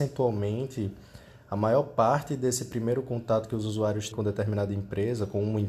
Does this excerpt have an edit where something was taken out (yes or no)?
yes